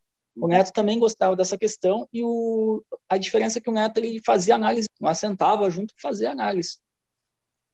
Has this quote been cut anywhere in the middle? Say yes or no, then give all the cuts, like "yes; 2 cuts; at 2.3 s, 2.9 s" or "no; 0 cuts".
yes; 2 cuts; at 4.8 s, 5.9 s